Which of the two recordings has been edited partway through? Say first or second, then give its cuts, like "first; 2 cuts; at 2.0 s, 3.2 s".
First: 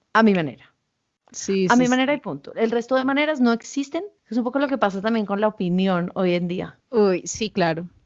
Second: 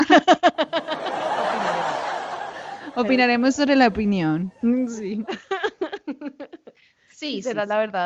first; 2 cuts; at 4.2 s, 6.8 s